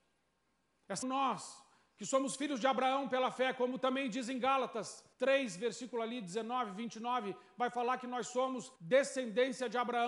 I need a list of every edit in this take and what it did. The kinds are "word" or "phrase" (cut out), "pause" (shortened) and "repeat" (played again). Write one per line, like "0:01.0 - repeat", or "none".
0:01.0 - phrase
0:05.1 - pause
0:08.8 - pause